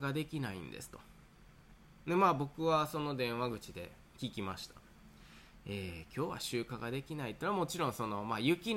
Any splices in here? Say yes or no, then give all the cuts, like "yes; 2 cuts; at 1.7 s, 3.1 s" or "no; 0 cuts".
no; 0 cuts